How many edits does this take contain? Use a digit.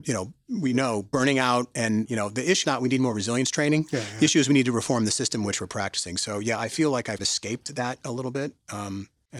3